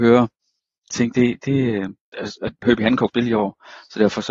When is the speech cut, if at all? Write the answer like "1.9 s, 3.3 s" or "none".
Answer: 0.9 s, 2.1 s, 2.6 s, 3.1 s